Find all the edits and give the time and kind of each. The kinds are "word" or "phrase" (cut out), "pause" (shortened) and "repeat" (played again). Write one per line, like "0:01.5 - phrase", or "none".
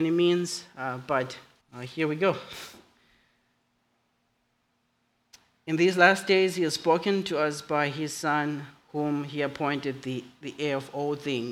0:01.6 - pause